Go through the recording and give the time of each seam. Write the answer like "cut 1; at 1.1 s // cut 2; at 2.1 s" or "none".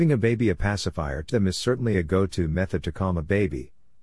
cut 1; at 1.3 s